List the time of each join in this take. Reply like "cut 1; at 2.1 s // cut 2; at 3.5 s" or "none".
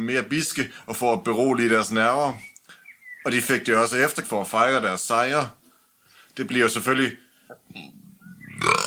cut 1; at 4.2 s